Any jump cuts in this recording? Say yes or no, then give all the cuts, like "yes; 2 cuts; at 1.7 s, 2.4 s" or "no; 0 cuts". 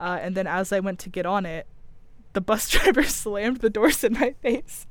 no; 0 cuts